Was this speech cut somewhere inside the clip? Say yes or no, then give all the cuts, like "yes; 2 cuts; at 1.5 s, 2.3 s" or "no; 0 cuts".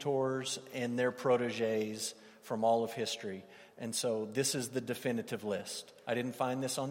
no; 0 cuts